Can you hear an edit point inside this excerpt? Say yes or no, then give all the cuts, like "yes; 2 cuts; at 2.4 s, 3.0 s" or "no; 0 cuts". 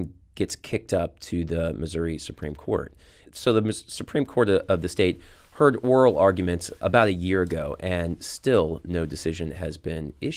no; 0 cuts